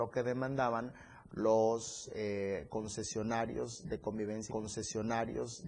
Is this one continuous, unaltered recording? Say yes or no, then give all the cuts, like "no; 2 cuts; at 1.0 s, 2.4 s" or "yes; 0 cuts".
no; 1 cut; at 4.5 s